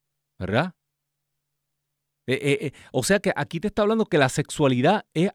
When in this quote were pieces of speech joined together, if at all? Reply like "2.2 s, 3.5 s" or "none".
none